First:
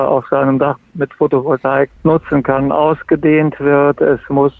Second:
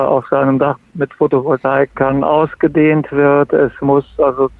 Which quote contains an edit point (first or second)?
second